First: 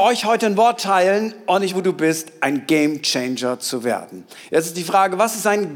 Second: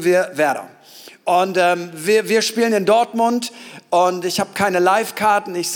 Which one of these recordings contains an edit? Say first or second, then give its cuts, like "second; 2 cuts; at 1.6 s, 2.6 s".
first; 1 cut; at 1.7 s